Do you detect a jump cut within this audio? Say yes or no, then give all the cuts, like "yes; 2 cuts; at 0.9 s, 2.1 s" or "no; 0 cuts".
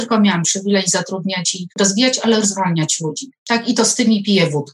yes; 3 cuts; at 1.7 s, 2.4 s, 3.4 s